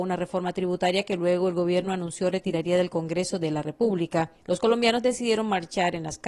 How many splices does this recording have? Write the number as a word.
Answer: one